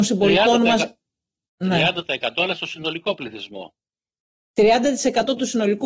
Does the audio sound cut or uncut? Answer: uncut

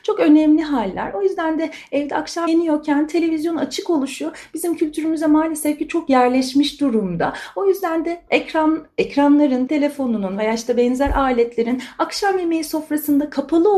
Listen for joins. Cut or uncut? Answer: cut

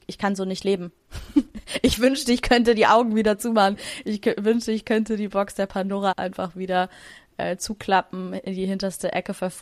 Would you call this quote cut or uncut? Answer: cut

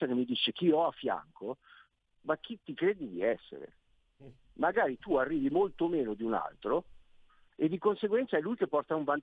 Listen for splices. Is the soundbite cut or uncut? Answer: uncut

